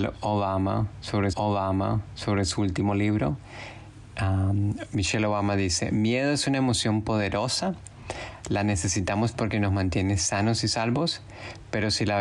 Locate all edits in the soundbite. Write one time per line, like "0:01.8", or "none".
0:01.3

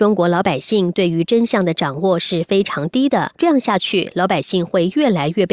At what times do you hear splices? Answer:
0:03.3

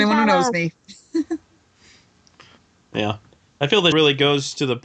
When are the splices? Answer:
0:03.9

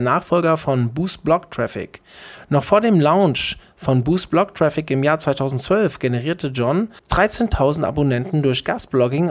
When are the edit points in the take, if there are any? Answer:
0:07.0

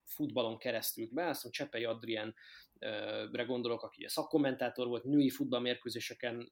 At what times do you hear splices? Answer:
0:01.1

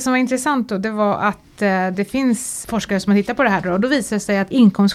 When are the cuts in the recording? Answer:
none

